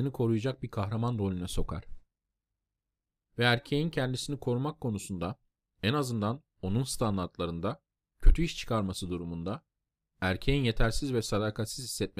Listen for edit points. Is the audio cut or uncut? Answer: uncut